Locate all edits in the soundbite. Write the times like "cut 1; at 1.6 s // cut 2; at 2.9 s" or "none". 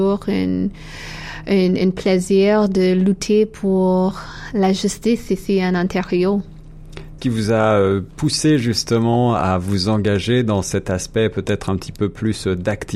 cut 1; at 7.2 s